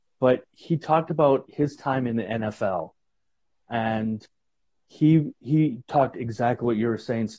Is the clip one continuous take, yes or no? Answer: yes